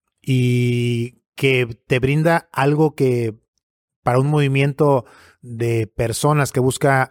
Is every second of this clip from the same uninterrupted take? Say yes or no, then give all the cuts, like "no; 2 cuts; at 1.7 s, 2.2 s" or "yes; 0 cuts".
yes; 0 cuts